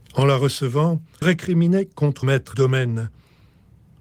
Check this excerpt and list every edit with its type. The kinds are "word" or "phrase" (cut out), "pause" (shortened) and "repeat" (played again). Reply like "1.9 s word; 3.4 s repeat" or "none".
1.2 s word; 2.2 s word; 2.5 s word